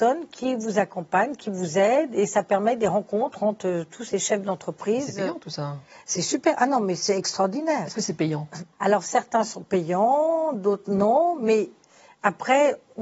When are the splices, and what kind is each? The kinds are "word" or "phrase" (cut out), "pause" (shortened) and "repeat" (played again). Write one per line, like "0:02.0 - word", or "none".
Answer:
0:08.7 - pause